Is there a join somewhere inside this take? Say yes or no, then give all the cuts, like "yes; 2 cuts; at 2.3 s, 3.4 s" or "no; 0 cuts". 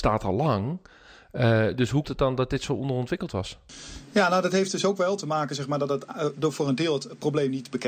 yes; 1 cut; at 2.0 s